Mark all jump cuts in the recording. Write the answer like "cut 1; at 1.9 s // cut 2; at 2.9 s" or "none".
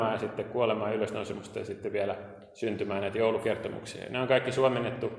none